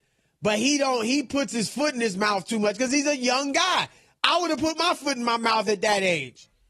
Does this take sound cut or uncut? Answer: uncut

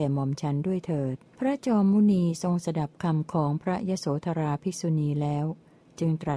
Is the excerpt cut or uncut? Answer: cut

